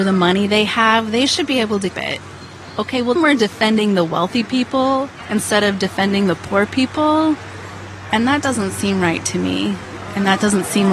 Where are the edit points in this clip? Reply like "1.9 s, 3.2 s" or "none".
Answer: 1.9 s, 3.2 s

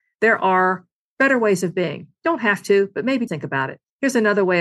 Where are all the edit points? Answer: 3.3 s

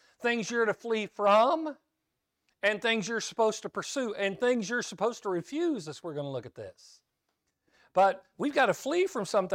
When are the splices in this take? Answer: none

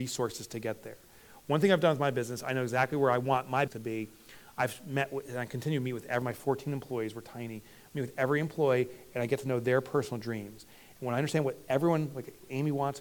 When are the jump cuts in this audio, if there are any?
3.7 s, 6.2 s

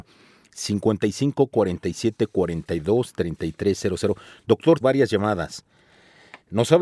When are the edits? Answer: 4.8 s

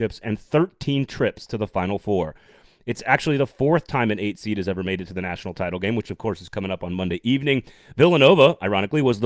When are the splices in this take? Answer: none

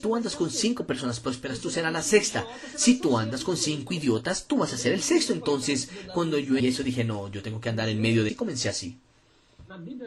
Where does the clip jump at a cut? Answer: 6.6 s, 8.3 s

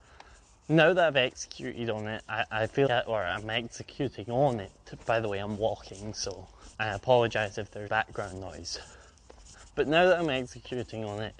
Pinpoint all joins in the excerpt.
2.9 s, 6.7 s, 7.9 s, 9.5 s

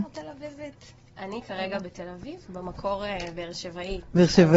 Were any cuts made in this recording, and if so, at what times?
2.5 s

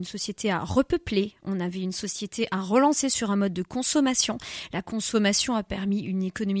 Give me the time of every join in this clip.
none

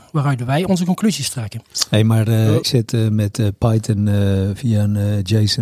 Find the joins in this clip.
2.6 s

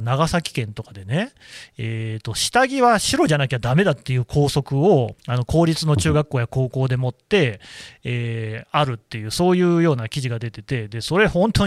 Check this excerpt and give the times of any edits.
5.2 s

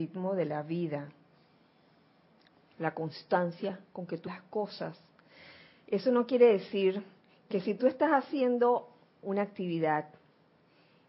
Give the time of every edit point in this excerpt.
4.3 s, 9.2 s

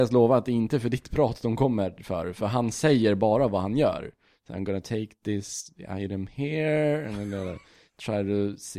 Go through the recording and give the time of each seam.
none

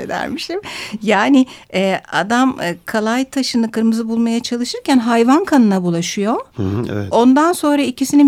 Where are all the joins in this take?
none

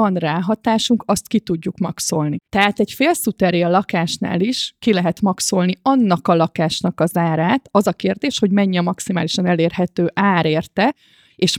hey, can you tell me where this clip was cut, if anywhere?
2.5 s

